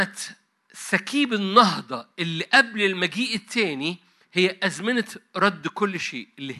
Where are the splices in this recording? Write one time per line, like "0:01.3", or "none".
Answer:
none